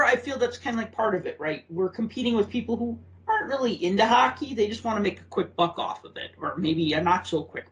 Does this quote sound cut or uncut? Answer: uncut